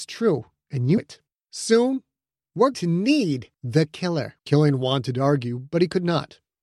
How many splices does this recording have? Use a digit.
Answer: 5